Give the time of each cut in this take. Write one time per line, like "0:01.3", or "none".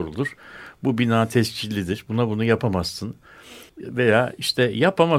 0:03.7